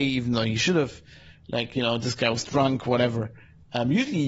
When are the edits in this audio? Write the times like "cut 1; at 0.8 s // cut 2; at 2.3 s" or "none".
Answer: none